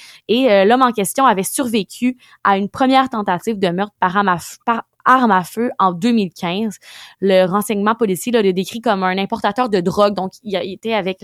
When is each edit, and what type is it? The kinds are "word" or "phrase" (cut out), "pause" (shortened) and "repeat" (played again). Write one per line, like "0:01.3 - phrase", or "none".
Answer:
none